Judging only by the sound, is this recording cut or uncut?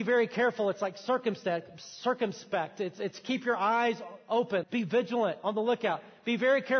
cut